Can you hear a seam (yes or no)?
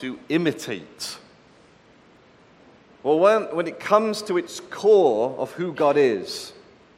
no